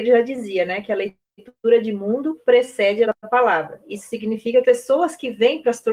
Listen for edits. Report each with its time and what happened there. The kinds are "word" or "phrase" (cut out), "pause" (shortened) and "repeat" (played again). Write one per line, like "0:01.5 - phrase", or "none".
0:03.0 - word
0:04.6 - word